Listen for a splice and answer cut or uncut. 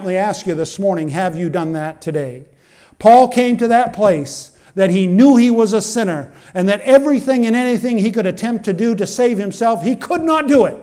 uncut